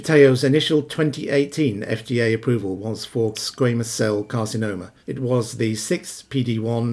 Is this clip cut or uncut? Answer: cut